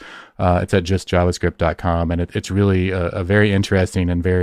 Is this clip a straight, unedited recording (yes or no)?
yes